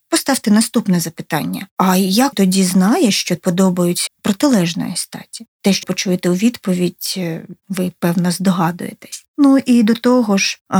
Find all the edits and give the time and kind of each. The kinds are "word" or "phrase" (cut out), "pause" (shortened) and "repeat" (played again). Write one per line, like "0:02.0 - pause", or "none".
0:02.3 - word
0:03.4 - word
0:04.1 - word
0:05.8 - word